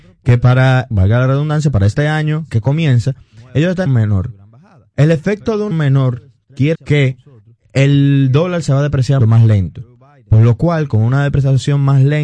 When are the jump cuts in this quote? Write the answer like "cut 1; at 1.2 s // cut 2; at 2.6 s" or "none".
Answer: cut 1; at 0.9 s // cut 2; at 2.5 s // cut 3; at 3.9 s // cut 4; at 5.7 s // cut 5; at 6.7 s // cut 6; at 9.2 s